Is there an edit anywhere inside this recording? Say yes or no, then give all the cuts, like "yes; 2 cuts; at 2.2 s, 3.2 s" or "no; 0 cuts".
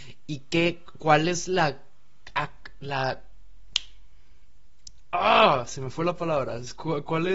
no; 0 cuts